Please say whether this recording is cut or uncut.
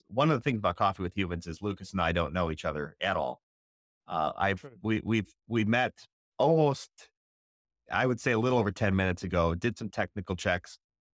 uncut